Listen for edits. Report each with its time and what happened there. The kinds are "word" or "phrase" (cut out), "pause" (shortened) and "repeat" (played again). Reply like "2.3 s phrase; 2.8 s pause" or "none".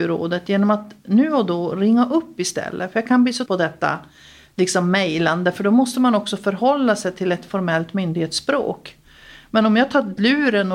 3.5 s word